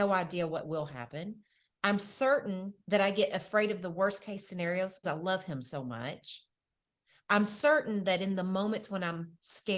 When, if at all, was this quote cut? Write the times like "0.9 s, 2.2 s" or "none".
5.0 s